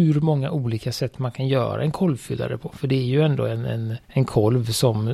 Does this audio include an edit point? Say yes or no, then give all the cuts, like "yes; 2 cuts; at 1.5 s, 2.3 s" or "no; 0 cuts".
yes; 1 cut; at 4.0 s